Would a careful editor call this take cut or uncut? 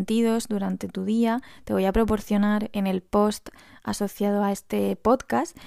uncut